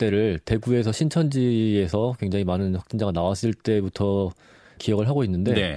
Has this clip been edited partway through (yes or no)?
yes